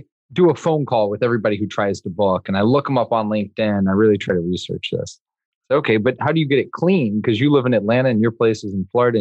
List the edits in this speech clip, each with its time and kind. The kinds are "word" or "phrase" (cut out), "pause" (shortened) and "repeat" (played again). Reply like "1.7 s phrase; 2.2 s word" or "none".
none